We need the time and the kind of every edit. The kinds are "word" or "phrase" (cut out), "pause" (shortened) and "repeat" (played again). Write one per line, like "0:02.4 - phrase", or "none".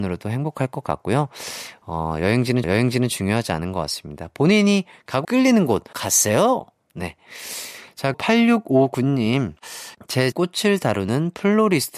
0:02.6 - repeat
0:05.2 - phrase
0:05.9 - word
0:08.1 - word
0:10.3 - word